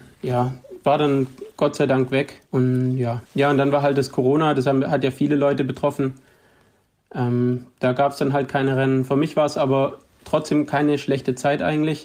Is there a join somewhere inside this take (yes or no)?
yes